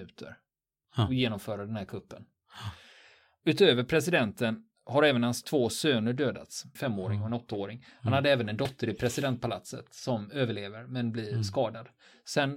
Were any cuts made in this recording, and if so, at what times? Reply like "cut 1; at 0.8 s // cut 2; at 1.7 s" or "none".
cut 1; at 6.8 s